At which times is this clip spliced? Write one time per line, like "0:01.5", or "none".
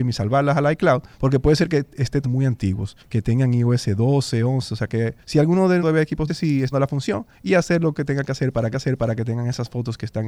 0:01.1
0:02.2
0:03.0
0:05.2
0:05.8
0:06.3
0:06.7
0:07.3
0:08.7